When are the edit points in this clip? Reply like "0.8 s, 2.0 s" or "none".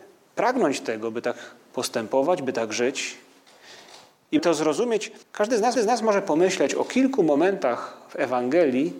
4.4 s, 5.2 s, 5.8 s